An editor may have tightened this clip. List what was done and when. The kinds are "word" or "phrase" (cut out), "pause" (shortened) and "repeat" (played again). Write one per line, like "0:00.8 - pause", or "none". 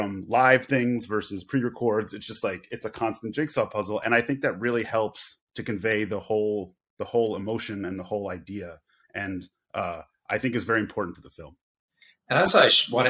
0:05.5 - pause